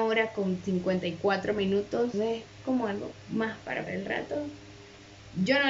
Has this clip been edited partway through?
yes; 2 cuts; at 2.1 s, 3.9 s

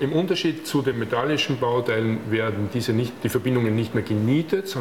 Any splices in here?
no; 0 cuts

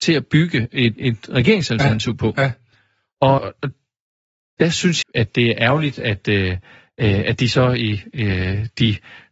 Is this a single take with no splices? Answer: no; 3 cuts; at 1.0 s, 3.4 s, 5.0 s

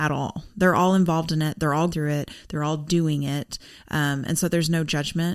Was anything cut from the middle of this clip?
yes; 1 cut; at 1.9 s

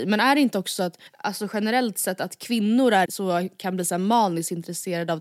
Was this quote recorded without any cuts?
no; 2 cuts; at 1.1 s, 3.1 s

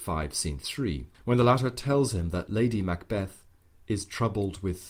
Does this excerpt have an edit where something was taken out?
yes; 1 cut; at 1.1 s

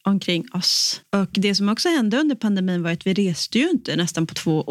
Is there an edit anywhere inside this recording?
no; 0 cuts

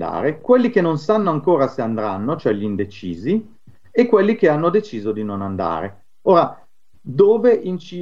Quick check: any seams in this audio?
no; 0 cuts

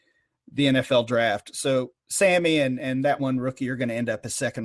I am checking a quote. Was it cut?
yes; 2 cuts; at 2.0 s, 3.2 s

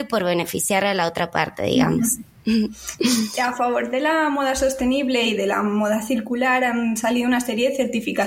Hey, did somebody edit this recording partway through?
no; 0 cuts

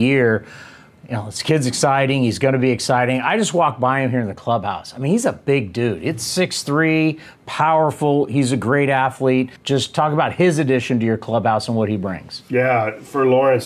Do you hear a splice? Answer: yes; 1 cut; at 9.6 s

